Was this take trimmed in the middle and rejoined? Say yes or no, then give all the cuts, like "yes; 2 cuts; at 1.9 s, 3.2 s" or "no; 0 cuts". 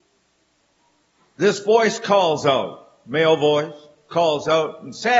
no; 0 cuts